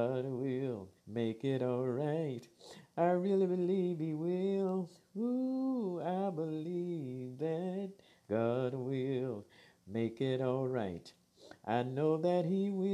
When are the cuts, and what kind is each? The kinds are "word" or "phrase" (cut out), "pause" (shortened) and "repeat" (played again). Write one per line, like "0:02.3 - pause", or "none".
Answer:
0:01.0 - pause